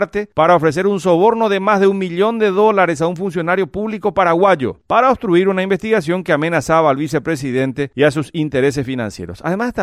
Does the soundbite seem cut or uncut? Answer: uncut